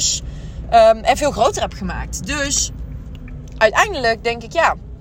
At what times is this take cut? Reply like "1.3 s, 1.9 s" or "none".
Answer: none